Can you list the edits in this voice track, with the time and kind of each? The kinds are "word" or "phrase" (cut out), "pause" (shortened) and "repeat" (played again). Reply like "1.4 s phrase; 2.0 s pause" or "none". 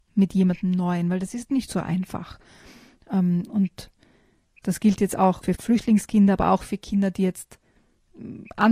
none